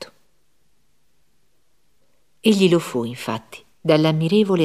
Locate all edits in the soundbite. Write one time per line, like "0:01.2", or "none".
none